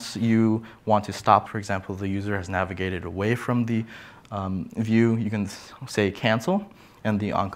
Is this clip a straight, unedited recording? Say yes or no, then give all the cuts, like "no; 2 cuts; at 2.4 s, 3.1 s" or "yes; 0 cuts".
no; 1 cut; at 1.5 s